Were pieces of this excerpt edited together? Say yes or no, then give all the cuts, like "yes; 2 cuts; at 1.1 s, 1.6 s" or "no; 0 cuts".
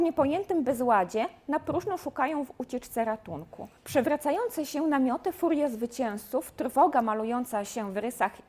yes; 1 cut; at 3.8 s